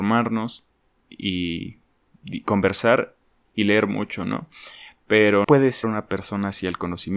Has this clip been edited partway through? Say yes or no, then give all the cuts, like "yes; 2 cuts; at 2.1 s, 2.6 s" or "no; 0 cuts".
yes; 3 cuts; at 3.5 s, 5.4 s, 5.8 s